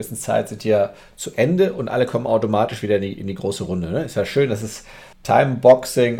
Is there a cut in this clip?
yes; 1 cut; at 5.1 s

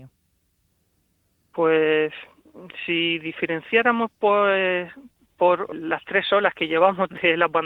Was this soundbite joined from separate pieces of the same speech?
yes; 1 cut; at 5.7 s

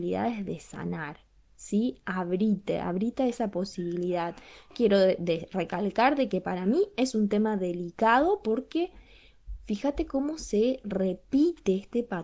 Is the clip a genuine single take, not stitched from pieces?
yes; 0 cuts

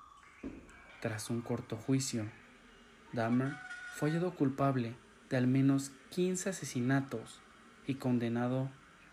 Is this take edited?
no; 0 cuts

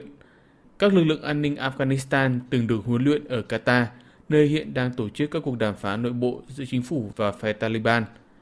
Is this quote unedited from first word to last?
yes; 0 cuts

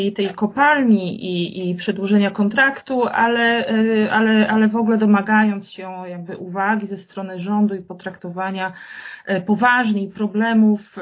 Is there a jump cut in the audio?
no; 0 cuts

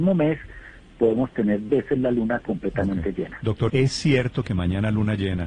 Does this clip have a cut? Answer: yes; 2 cuts; at 1.7 s, 3.7 s

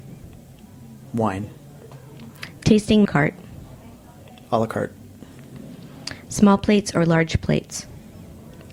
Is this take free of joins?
no; 1 cut; at 3.0 s

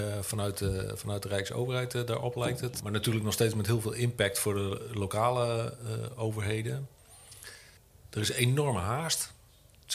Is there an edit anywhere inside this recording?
yes; 1 cut; at 7.8 s

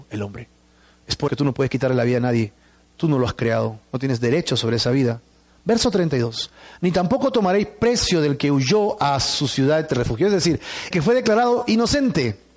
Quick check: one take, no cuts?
no; 2 cuts; at 1.3 s, 10.9 s

